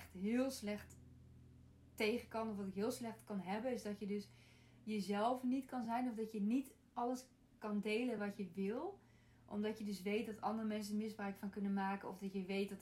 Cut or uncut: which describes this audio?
uncut